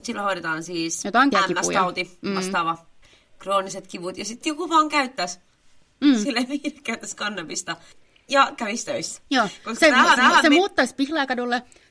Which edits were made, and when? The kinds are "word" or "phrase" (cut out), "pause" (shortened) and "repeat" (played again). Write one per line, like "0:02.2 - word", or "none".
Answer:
0:01.3 - word
0:03.0 - pause
0:04.4 - word
0:07.9 - pause
0:09.3 - pause
0:10.2 - repeat